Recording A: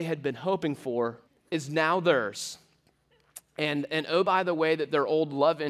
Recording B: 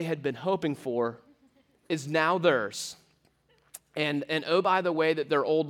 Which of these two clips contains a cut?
A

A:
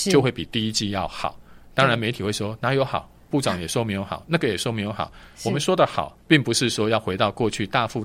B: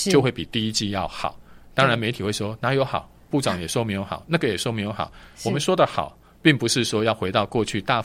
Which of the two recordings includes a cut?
A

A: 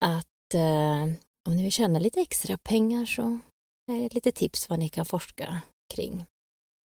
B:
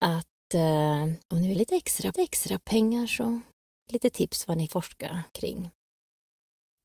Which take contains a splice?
B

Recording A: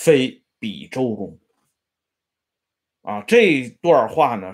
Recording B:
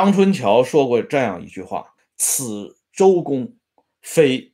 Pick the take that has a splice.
B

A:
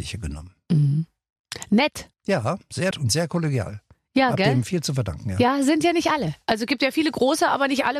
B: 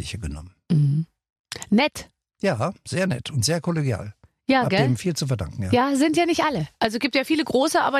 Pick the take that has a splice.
A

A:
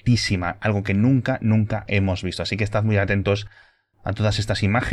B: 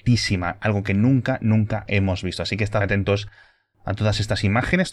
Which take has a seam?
B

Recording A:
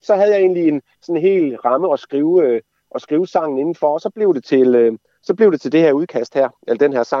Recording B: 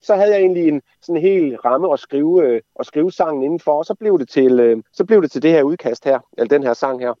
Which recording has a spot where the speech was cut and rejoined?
B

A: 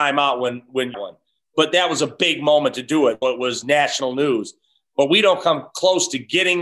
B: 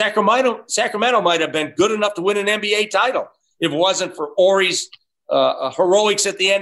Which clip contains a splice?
A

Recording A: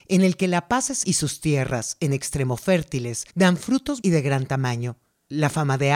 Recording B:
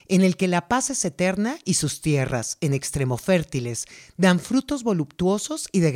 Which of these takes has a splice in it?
A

